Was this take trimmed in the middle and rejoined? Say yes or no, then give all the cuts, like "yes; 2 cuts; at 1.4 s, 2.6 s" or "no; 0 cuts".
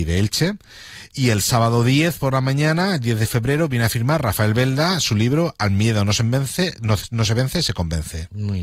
no; 0 cuts